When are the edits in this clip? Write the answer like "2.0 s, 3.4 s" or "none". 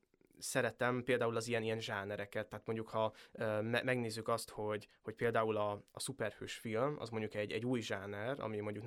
none